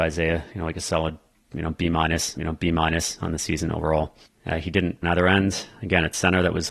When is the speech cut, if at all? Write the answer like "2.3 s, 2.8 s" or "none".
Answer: 2.4 s, 5.0 s